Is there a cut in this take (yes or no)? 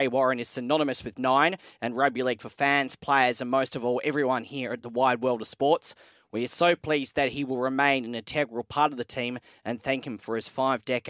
no